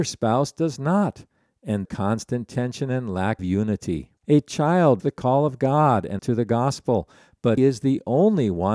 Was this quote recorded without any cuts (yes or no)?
no